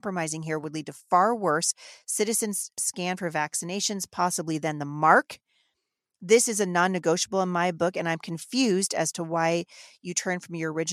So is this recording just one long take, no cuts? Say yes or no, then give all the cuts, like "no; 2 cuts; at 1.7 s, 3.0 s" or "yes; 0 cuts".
yes; 0 cuts